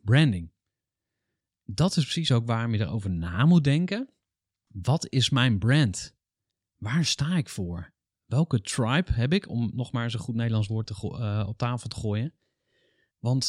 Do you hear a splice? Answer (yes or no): no